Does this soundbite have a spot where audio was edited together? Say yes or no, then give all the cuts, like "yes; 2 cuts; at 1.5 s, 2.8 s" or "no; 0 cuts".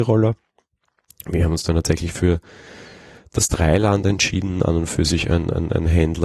no; 0 cuts